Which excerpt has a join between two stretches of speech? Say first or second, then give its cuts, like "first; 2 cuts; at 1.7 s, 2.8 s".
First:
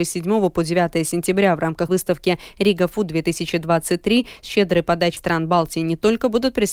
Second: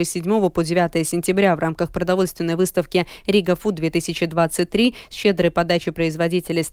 first; 2 cuts; at 1.9 s, 5.2 s